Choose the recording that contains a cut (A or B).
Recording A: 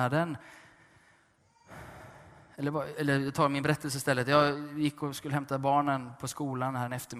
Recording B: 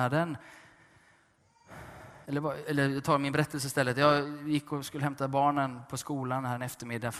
B